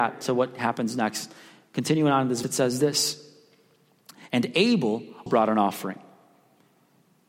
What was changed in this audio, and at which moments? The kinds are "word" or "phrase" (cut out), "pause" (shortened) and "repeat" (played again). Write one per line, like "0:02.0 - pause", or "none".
0:02.4 - word
0:05.3 - word

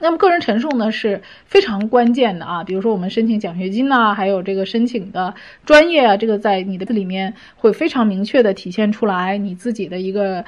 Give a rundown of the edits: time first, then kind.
0:06.9 - word

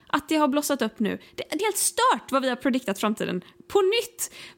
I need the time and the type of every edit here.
0:01.6 - word

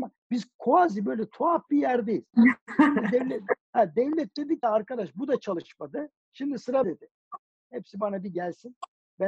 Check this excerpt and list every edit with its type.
0:04.6 - word
0:06.2 - pause
0:06.8 - word

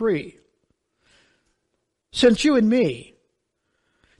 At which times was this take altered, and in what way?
0:02.4 - phrase

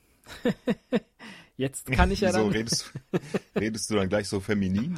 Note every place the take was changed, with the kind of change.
none

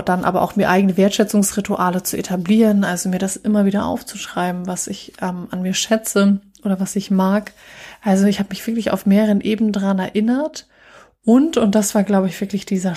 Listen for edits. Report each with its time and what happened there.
none

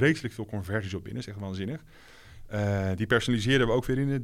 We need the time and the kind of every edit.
none

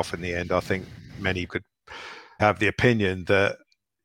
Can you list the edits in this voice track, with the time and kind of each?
0:01.5 - word
0:02.4 - word

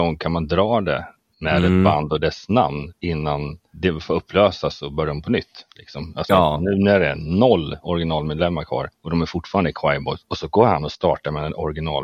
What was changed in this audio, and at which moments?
none

